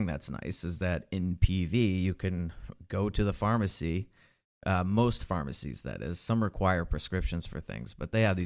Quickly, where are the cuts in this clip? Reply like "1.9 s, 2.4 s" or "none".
none